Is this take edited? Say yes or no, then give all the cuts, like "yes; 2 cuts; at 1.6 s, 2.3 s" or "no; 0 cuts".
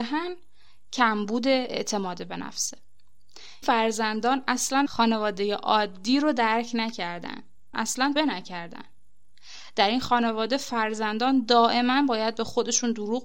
yes; 4 cuts; at 3.6 s, 4.9 s, 7.7 s, 8.2 s